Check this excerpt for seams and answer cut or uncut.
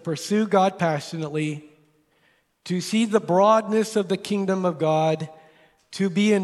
uncut